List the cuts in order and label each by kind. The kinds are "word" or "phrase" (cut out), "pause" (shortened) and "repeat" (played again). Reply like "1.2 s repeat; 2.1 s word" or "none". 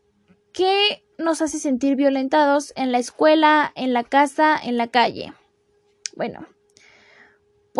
1.1 s pause